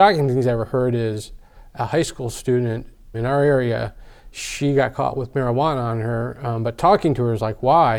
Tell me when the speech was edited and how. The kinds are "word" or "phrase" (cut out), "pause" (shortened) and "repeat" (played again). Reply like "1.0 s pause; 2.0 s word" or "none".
3.1 s word